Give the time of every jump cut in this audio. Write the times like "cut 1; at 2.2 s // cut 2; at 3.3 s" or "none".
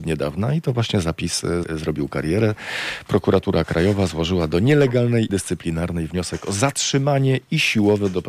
cut 1; at 1.6 s // cut 2; at 5.3 s